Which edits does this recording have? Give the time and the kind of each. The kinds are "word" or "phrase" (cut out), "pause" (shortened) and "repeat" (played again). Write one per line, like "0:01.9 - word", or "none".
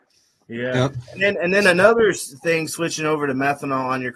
none

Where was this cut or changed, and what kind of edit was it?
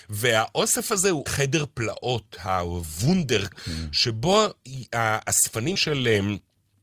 0:01.3 - phrase
0:03.5 - word
0:05.8 - word

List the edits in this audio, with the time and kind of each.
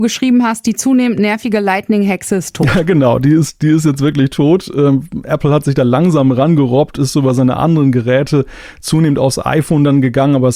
none

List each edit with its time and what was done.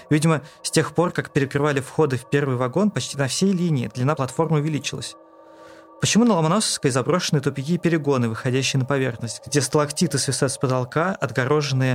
none

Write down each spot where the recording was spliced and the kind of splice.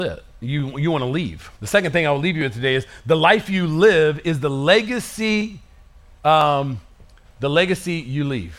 0:01.6 - pause

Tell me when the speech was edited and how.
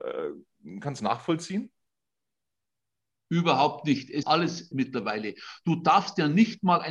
0:01.0 - phrase
0:04.2 - word
0:04.7 - word

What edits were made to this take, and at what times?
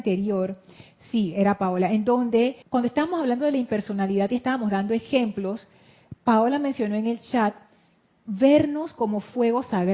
0:02.6 - pause

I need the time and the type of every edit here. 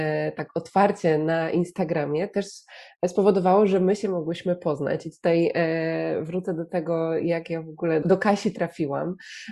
0:08.0 - word

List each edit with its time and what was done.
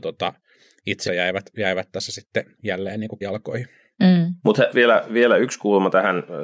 0:01.1 - word
0:02.6 - word
0:03.2 - word
0:04.7 - word

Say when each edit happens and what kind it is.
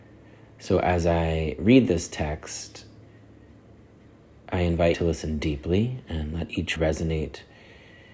0:04.9 - word
0:06.8 - word

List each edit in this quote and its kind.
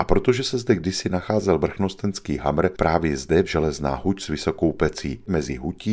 0:03.4 - word

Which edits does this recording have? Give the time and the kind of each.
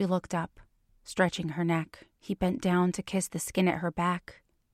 0:02.1 - pause

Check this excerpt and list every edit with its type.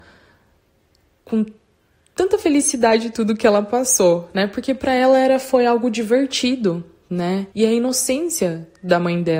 0:07.5 - pause

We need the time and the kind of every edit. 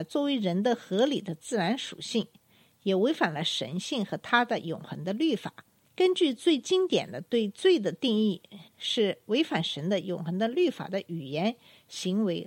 0:05.8 - pause
0:08.7 - pause

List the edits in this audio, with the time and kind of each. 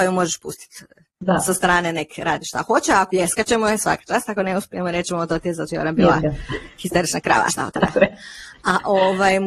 0:03.1 - phrase
0:05.7 - word
0:07.5 - word

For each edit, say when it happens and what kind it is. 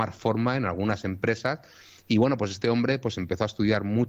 none

